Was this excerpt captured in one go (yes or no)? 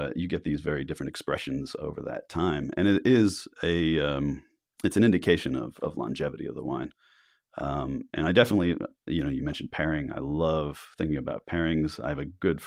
yes